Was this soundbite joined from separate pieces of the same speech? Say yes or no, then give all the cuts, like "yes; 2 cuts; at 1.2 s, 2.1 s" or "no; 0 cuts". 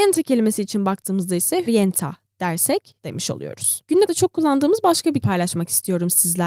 yes; 4 cuts; at 1.7 s, 3.0 s, 4.1 s, 5.2 s